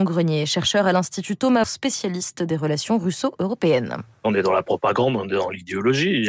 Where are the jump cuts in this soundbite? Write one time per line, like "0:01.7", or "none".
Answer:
0:01.6